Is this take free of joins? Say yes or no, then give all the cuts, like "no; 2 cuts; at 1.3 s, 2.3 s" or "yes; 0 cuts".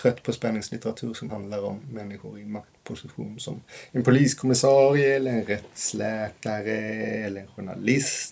no; 1 cut; at 1.3 s